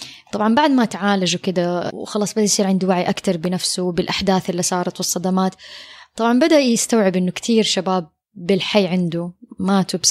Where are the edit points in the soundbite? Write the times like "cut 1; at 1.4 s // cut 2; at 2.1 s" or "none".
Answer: none